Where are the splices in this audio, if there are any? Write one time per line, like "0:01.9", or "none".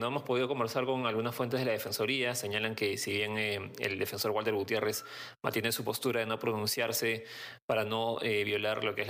none